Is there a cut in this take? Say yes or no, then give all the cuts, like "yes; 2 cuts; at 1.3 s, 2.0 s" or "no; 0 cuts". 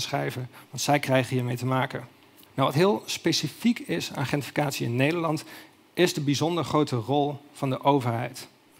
no; 0 cuts